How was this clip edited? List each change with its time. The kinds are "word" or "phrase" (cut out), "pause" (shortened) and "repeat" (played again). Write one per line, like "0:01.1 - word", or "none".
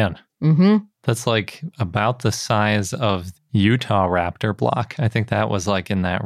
0:00.9 - pause
0:03.3 - word